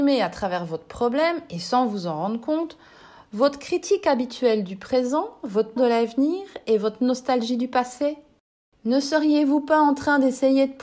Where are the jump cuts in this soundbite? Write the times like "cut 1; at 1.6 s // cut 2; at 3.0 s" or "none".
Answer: cut 1; at 5.8 s